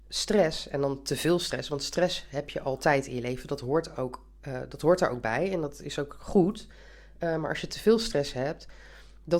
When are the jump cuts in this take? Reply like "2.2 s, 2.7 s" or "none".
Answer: none